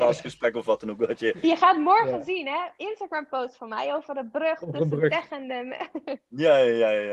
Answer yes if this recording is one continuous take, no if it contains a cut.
yes